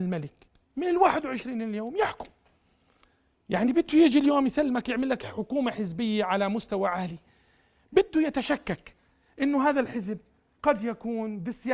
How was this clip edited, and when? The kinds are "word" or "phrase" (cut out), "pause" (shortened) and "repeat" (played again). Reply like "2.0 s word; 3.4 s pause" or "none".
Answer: none